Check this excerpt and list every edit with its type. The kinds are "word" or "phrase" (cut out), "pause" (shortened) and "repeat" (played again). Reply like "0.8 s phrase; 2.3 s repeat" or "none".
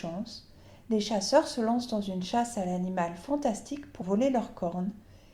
4.0 s word